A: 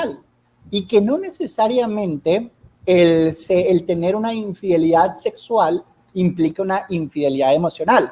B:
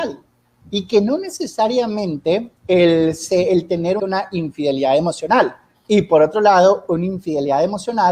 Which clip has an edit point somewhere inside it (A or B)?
B